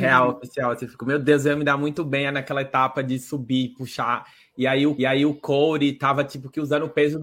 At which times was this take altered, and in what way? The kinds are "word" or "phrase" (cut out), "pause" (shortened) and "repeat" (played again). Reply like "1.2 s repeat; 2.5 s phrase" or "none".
5.0 s repeat